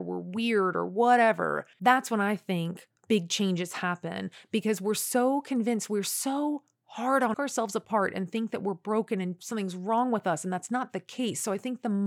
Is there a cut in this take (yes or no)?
yes